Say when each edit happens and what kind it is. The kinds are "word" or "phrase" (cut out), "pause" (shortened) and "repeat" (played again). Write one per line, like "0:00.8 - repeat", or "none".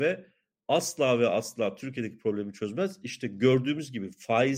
none